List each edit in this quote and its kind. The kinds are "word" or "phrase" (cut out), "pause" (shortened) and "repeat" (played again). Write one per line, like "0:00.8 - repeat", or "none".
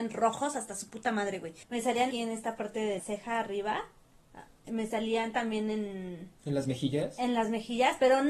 0:01.6 - pause
0:02.1 - word
0:03.0 - word
0:06.4 - pause